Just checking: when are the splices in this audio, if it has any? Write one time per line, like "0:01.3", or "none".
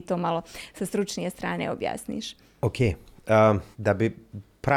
0:03.7